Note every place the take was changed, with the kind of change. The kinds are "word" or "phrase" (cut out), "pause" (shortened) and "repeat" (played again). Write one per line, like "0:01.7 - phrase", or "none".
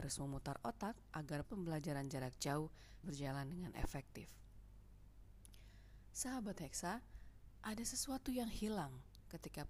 0:01.4 - word
0:03.0 - word